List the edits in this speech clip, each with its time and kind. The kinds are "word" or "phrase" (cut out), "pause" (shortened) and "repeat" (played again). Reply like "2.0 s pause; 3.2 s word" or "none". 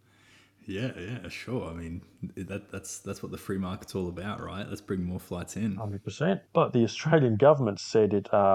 6.5 s pause

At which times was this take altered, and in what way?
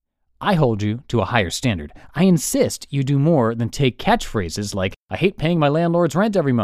5.0 s pause

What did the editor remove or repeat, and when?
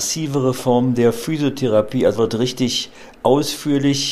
2.2 s word

